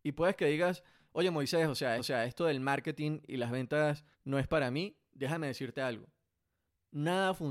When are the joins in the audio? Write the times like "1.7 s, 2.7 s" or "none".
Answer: 2.0 s, 4.1 s